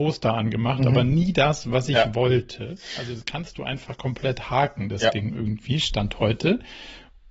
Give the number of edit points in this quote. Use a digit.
0